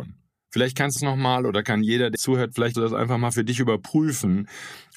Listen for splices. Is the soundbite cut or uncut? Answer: cut